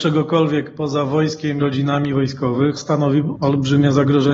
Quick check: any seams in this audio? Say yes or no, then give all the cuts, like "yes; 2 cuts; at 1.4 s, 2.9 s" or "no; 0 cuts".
yes; 3 cuts; at 1.6 s, 2.8 s, 3.3 s